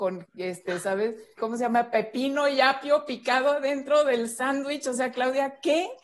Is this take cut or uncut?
cut